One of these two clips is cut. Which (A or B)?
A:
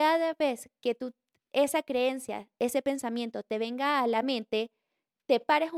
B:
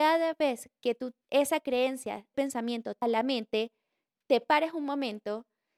B